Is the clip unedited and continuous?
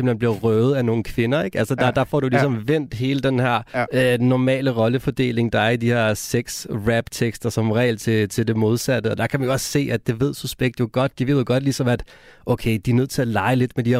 no; 1 cut; at 3.7 s

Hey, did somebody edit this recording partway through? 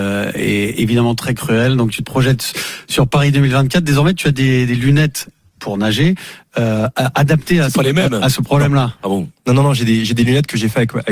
no; 0 cuts

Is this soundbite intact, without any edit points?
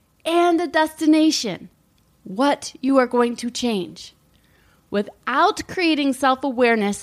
yes; 0 cuts

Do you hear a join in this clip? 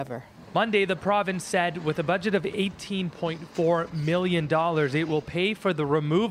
no; 0 cuts

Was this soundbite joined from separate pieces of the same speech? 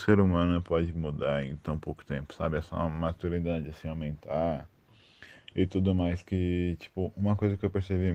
no; 0 cuts

